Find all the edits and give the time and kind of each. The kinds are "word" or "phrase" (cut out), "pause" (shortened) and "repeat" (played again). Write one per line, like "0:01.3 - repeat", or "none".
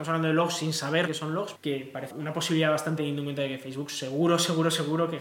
0:01.1 - word
0:01.5 - word
0:02.1 - word
0:03.0 - word